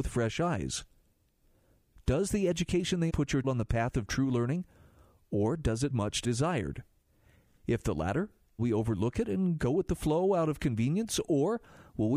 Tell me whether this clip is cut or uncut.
cut